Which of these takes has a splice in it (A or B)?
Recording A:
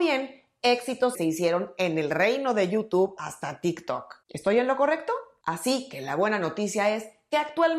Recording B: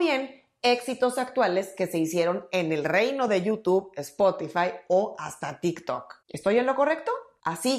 A